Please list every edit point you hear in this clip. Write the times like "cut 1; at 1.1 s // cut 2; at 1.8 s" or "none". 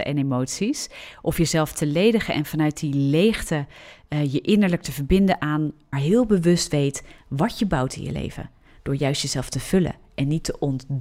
cut 1; at 5.9 s